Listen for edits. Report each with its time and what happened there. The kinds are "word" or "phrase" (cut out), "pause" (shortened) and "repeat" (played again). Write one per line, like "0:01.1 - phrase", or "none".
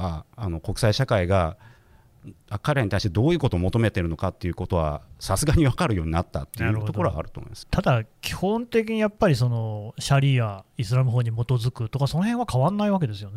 0:07.6 - word